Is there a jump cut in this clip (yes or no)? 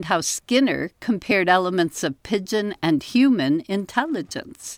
no